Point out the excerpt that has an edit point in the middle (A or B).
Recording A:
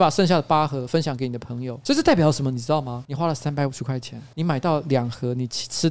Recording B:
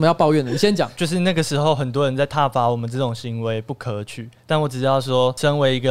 B